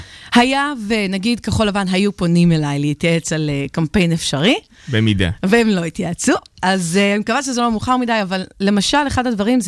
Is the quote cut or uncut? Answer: uncut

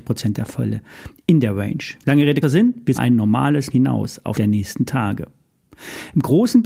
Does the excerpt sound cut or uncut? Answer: cut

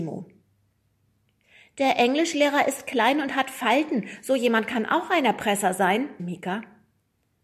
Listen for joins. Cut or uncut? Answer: cut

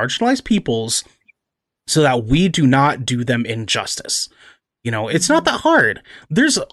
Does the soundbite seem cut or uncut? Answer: uncut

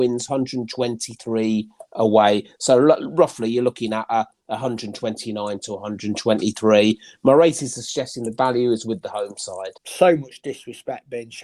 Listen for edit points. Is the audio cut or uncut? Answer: cut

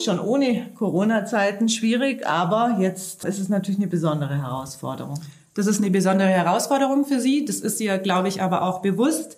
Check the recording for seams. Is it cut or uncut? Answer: cut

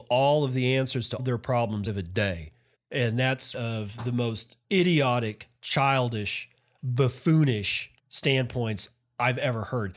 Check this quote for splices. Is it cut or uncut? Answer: cut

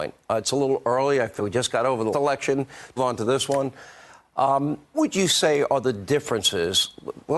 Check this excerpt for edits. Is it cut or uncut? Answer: cut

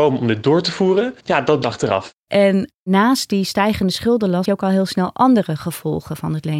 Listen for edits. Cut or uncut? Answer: cut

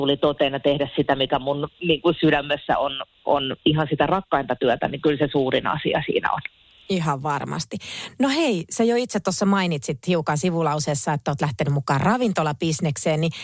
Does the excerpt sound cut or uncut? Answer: uncut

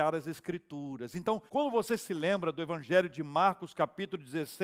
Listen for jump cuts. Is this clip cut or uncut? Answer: cut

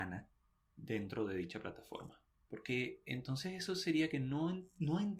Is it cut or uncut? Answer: cut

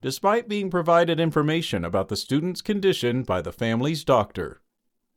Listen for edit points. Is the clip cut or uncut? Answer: uncut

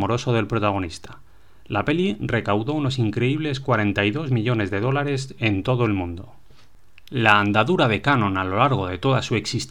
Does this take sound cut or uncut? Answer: uncut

